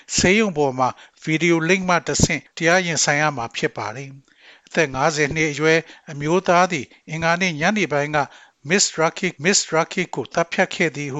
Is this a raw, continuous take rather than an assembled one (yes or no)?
no